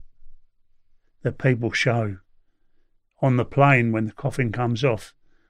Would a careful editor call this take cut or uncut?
uncut